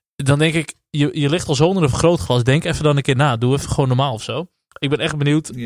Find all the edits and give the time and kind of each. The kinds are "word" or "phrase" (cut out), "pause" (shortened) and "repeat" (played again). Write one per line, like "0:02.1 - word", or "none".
none